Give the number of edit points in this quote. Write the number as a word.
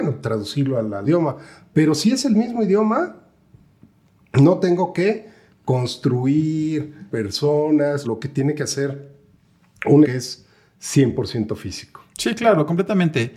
four